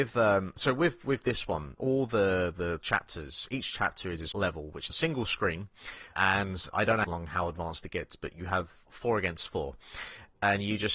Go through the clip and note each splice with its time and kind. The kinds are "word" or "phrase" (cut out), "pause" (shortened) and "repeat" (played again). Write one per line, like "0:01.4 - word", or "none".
0:01.8 - word
0:04.3 - phrase
0:04.9 - phrase
0:06.1 - word
0:06.7 - word
0:07.0 - phrase
0:08.9 - phrase